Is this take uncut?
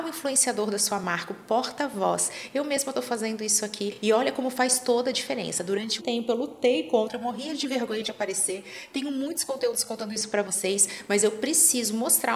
no; 1 cut; at 6.0 s

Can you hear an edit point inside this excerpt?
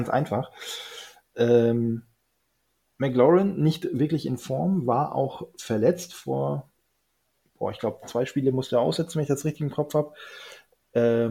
no; 0 cuts

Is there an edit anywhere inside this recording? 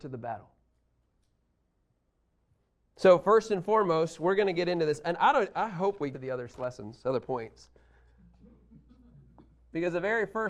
yes; 2 cuts; at 6.1 s, 6.5 s

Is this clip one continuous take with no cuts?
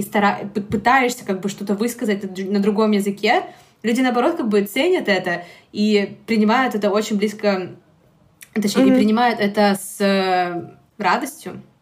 yes; 0 cuts

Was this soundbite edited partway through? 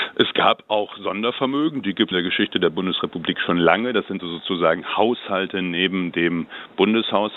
yes; 2 cuts; at 2.1 s, 4.2 s

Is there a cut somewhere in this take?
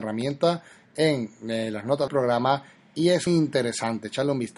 yes; 2 cuts; at 2.1 s, 3.3 s

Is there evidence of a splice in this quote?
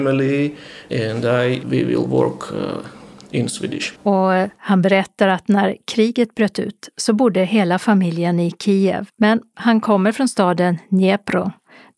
yes; 3 cuts; at 1.6 s, 4.0 s, 9.1 s

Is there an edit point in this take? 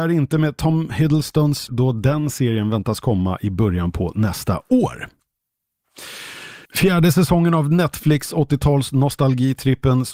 yes; 2 cuts; at 1.7 s, 6.7 s

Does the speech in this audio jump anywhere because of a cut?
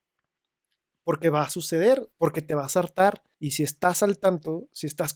yes; 2 cuts; at 2.1 s, 3.3 s

